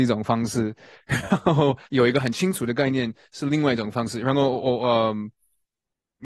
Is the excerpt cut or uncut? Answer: cut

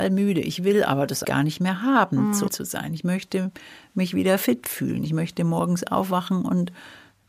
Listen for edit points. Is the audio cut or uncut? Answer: cut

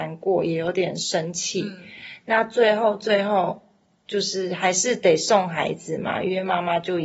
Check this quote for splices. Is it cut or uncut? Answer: uncut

